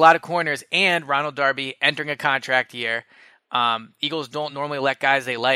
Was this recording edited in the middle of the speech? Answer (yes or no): no